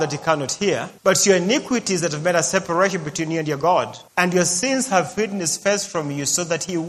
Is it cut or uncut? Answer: cut